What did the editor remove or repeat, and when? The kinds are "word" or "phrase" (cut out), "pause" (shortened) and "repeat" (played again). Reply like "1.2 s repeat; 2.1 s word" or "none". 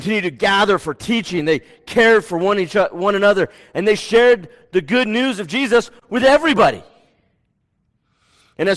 none